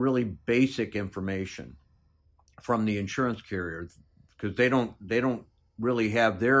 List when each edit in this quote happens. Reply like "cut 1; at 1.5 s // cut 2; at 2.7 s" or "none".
none